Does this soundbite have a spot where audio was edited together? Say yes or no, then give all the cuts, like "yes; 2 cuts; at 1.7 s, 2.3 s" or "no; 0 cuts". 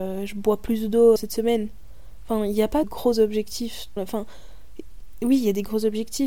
yes; 3 cuts; at 1.2 s, 2.8 s, 4.0 s